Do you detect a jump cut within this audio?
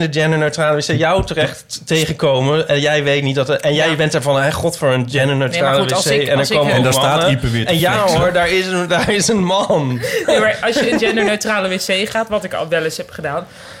no; 0 cuts

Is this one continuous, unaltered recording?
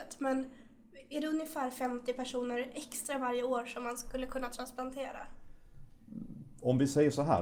yes; 0 cuts

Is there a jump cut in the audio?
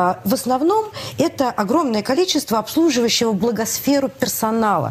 no; 0 cuts

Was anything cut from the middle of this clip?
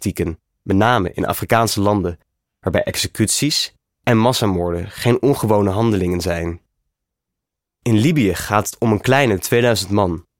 no; 0 cuts

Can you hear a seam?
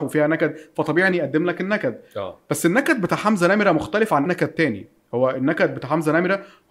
yes; 2 cuts; at 1.1 s, 4.3 s

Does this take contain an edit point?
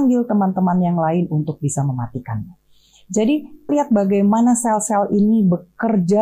yes; 1 cut; at 3.7 s

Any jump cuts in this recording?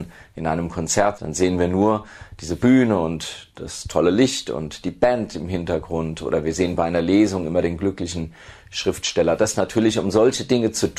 yes; 1 cut; at 1.2 s

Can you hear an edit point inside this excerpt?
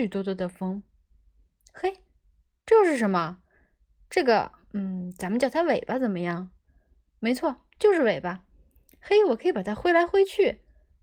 no; 0 cuts

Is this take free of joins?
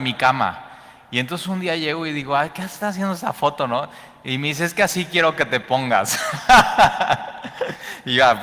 yes; 0 cuts

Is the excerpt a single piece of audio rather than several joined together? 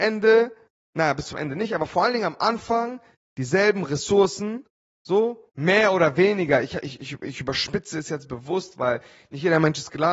yes; 0 cuts

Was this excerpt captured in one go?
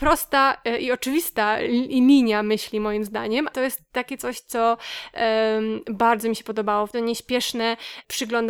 no; 2 cuts; at 3.5 s, 6.9 s

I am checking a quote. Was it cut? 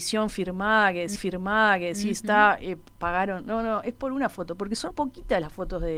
yes; 2 cuts; at 1.2 s, 4.9 s

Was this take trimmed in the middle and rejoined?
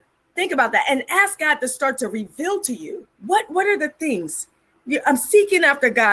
yes; 1 cut; at 3.1 s

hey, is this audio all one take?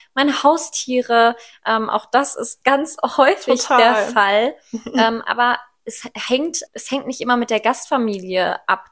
no; 1 cut; at 6.7 s

